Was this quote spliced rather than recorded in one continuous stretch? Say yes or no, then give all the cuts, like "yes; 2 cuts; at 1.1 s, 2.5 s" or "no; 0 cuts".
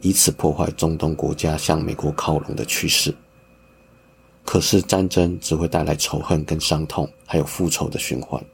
no; 0 cuts